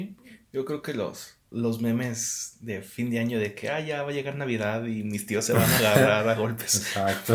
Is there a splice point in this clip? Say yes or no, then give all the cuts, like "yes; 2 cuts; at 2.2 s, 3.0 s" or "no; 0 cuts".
yes; 1 cut; at 1.5 s